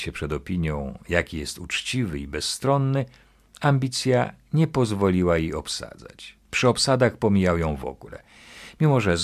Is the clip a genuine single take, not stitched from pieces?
yes; 0 cuts

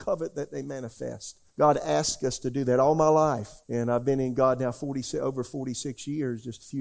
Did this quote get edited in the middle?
yes; 2 cuts; at 1.5 s, 3.6 s

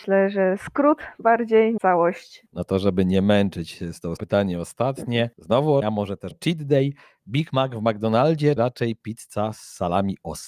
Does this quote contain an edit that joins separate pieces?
yes; 5 cuts; at 1.8 s, 4.2 s, 5.8 s, 6.3 s, 8.6 s

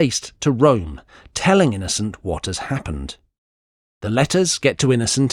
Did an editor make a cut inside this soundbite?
no; 0 cuts

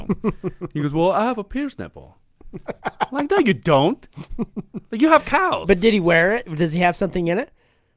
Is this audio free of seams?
yes; 0 cuts

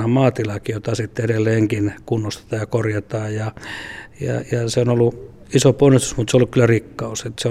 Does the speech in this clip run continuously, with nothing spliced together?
yes; 0 cuts

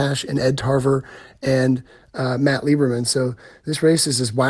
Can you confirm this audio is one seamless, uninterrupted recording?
yes; 0 cuts

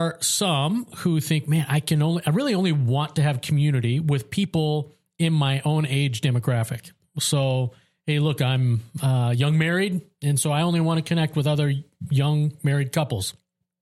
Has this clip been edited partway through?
no; 0 cuts

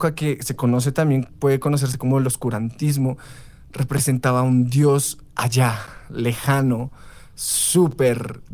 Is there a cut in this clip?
yes; 1 cut; at 5.2 s

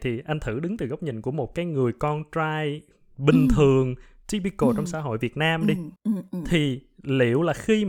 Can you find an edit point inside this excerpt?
yes; 1 cut; at 6.0 s

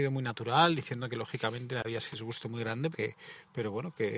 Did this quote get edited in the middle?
yes; 2 cuts; at 2.1 s, 2.9 s

